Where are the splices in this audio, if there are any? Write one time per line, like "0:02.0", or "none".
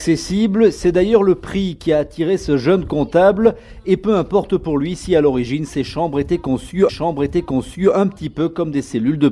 0:06.9